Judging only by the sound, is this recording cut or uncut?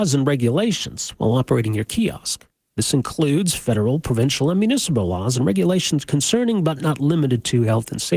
uncut